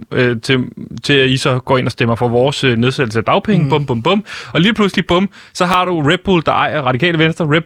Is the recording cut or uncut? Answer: uncut